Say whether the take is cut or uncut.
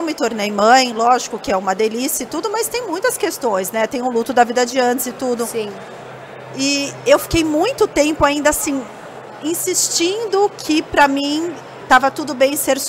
uncut